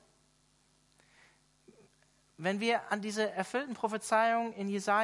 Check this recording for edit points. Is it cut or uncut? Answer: uncut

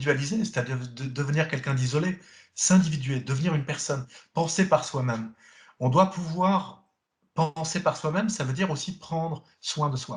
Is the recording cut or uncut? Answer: uncut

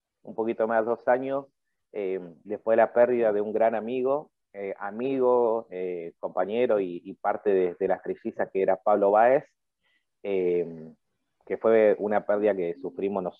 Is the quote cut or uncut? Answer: uncut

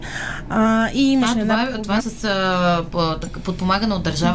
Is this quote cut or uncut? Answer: cut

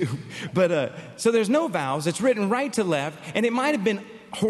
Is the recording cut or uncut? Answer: uncut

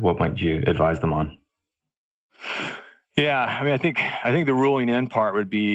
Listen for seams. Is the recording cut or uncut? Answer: uncut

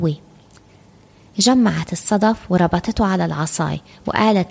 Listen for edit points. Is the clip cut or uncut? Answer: uncut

